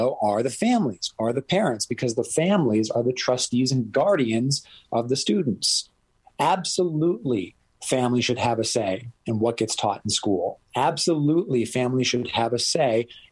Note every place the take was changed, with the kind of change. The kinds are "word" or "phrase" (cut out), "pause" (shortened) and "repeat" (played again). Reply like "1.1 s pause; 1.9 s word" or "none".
none